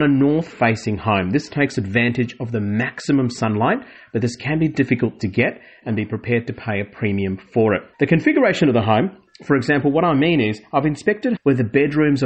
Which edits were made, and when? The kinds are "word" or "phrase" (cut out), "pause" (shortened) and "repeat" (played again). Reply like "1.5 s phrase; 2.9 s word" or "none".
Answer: 7.9 s pause; 11.4 s word